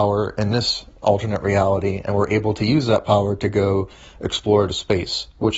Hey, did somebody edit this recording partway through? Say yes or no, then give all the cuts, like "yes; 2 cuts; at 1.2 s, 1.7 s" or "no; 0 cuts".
no; 0 cuts